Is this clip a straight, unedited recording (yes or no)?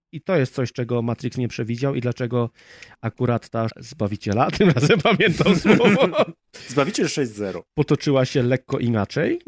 no